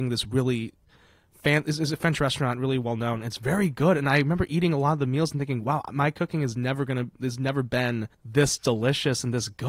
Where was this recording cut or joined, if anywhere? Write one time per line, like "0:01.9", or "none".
0:08.1